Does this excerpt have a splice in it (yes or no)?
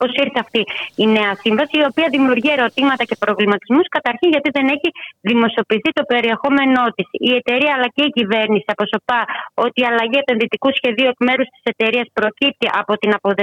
no